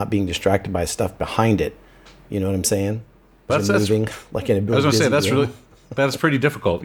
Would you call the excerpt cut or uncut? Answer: cut